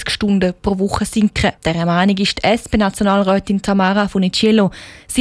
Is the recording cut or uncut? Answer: cut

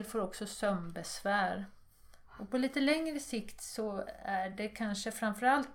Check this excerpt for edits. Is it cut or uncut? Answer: uncut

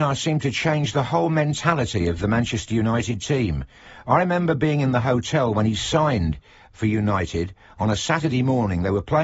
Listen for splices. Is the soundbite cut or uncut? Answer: uncut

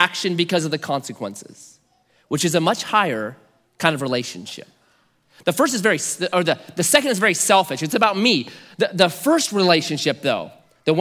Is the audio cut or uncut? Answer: uncut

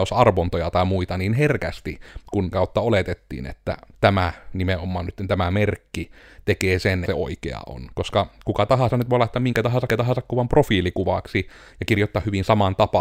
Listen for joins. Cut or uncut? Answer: cut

